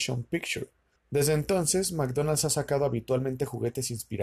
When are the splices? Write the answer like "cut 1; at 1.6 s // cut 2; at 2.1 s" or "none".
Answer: cut 1; at 1.0 s